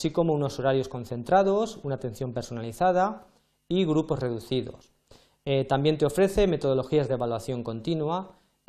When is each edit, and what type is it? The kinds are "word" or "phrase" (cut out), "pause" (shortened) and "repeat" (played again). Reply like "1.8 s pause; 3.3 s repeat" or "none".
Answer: none